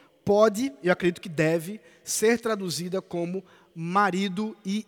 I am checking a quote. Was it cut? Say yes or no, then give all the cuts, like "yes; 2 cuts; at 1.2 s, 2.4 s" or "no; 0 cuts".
no; 0 cuts